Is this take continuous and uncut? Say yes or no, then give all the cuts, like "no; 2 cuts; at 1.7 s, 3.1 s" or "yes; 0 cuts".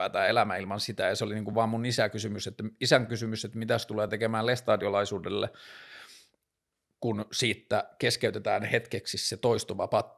yes; 0 cuts